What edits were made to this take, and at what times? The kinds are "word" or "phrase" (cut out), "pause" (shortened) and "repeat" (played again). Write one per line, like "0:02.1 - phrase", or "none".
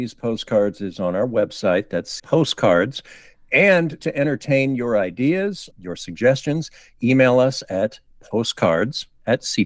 0:02.2 - phrase
0:04.0 - phrase
0:05.7 - word